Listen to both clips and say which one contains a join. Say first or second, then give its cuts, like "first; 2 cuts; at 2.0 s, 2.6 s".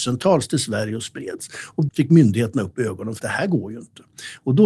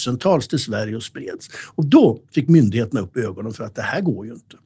first; 2 cuts; at 1.9 s, 3.2 s